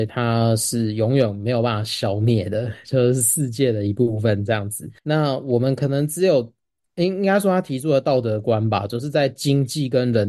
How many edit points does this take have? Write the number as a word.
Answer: one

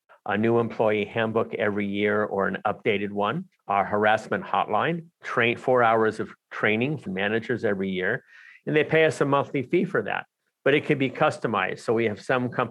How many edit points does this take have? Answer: two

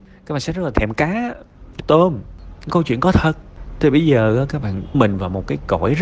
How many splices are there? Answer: three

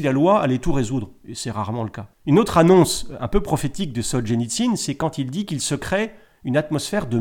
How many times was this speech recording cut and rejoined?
zero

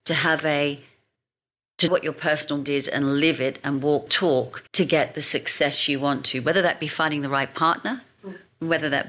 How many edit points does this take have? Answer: four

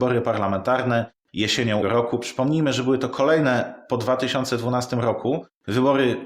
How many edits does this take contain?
one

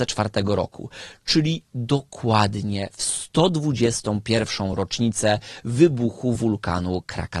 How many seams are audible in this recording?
zero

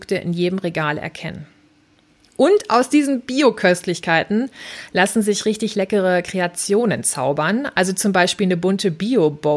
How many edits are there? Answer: zero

